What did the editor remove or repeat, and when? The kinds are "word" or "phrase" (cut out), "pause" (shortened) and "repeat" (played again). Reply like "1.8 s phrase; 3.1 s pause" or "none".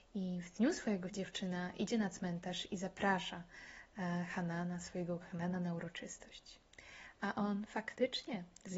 1.1 s word; 5.2 s word